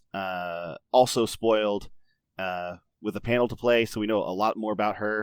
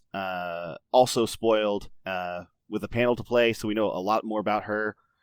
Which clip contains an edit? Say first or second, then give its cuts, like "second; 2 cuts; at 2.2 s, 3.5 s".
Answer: second; 1 cut; at 2.0 s